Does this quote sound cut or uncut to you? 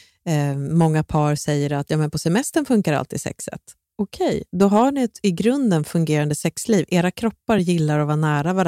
uncut